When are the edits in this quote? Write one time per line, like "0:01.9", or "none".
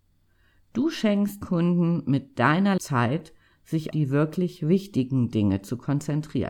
0:01.4
0:02.8
0:03.9